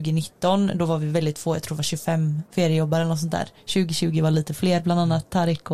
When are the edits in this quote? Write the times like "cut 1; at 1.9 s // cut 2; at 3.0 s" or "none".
cut 1; at 2.5 s